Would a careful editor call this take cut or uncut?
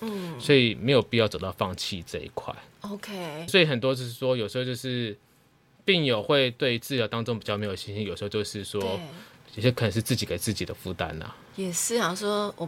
cut